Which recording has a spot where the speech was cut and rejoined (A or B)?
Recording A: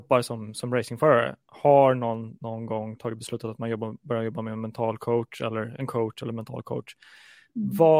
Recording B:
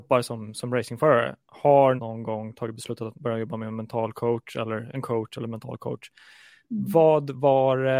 B